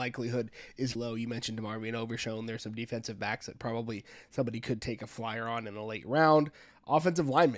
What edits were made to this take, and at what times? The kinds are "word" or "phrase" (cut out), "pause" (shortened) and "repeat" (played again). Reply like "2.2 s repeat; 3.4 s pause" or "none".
0.9 s word